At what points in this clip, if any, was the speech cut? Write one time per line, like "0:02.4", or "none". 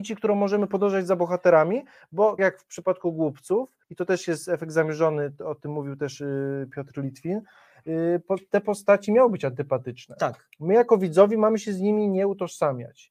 0:02.4
0:03.8